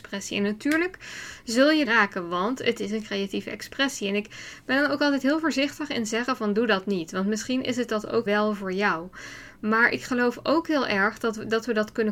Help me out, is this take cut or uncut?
cut